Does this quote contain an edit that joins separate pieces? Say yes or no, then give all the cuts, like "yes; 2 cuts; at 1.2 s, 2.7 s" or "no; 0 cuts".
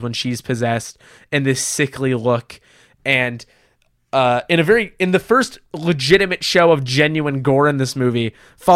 no; 0 cuts